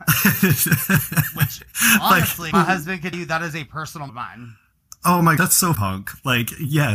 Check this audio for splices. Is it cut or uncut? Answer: cut